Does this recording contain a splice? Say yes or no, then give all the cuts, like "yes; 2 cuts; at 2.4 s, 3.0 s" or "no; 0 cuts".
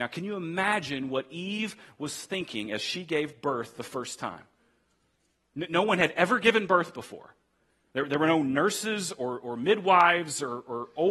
no; 0 cuts